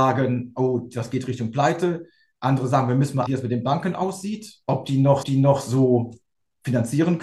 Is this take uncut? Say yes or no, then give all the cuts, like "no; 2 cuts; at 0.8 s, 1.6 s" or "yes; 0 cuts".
no; 3 cuts; at 3.3 s, 4.6 s, 5.2 s